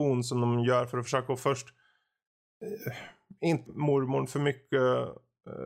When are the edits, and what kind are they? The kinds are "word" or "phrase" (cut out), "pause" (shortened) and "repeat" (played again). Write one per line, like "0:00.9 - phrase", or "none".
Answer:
0:03.7 - word